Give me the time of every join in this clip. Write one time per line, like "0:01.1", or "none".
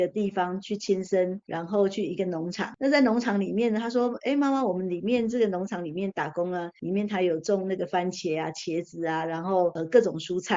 none